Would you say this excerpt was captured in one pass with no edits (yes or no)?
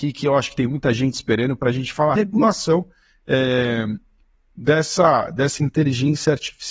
no